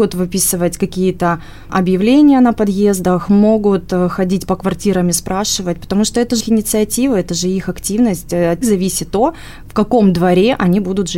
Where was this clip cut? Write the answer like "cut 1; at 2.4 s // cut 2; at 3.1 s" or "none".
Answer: cut 1; at 6.4 s // cut 2; at 8.6 s

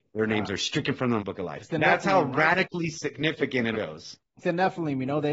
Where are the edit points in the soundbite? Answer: cut 1; at 1.2 s // cut 2; at 1.7 s // cut 3; at 3.7 s // cut 4; at 4.4 s

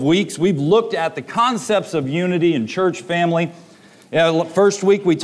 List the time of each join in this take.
none

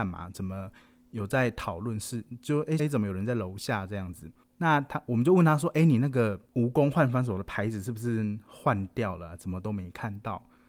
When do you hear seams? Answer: cut 1; at 2.8 s // cut 2; at 4.4 s // cut 3; at 6.5 s

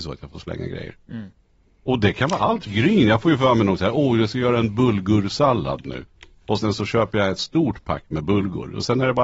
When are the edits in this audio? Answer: cut 1; at 2.7 s

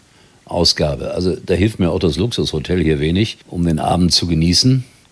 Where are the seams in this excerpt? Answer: cut 1; at 3.4 s

